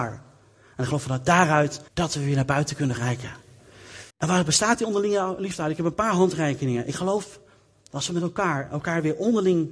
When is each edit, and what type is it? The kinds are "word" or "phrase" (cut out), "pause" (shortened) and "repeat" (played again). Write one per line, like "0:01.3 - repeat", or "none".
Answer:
0:01.9 - pause
0:03.0 - word
0:04.1 - pause